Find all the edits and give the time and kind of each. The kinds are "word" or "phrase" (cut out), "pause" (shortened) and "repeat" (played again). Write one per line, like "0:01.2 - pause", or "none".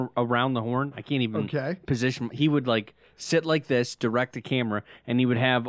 none